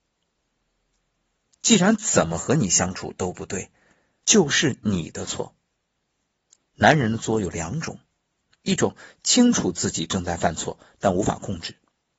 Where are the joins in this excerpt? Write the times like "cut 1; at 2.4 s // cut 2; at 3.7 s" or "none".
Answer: cut 1; at 4.2 s